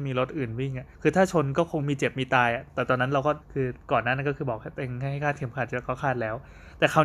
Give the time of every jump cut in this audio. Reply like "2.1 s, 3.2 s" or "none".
0.9 s, 3.4 s